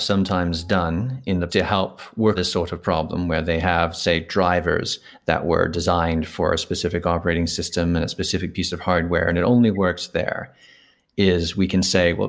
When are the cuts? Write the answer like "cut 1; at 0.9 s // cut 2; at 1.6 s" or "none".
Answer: cut 1; at 1.5 s // cut 2; at 2.4 s